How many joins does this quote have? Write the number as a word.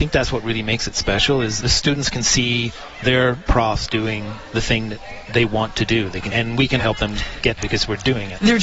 four